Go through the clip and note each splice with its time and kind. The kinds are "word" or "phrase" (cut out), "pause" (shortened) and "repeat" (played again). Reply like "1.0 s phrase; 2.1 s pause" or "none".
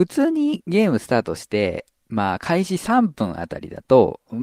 none